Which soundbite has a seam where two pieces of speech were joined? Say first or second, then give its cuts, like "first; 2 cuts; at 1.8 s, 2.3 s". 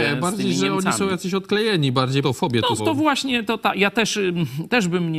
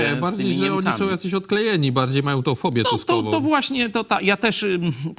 first; 2 cuts; at 2.2 s, 2.8 s